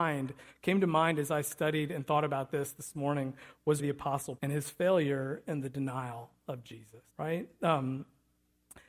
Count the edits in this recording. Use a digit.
3